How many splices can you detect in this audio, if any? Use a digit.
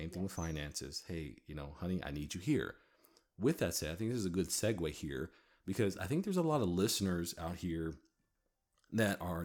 0